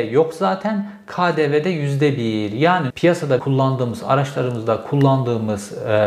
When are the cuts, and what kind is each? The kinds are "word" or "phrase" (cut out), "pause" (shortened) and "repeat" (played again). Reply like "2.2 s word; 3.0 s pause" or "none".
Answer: 2.9 s word; 3.4 s word